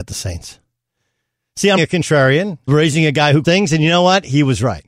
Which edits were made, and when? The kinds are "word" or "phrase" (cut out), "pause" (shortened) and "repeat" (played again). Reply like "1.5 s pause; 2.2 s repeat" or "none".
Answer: 1.8 s word; 2.7 s word; 3.4 s word